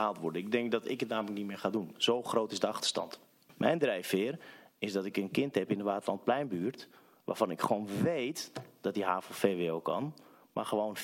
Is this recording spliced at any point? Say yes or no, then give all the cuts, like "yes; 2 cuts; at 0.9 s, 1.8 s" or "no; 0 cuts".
no; 0 cuts